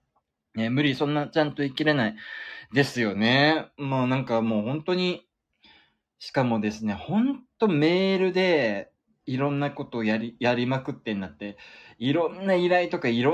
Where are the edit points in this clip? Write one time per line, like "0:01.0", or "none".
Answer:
none